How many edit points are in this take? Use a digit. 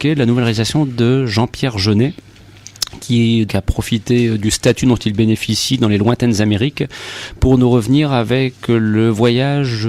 1